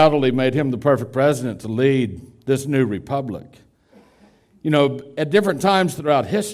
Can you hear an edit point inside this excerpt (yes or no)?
no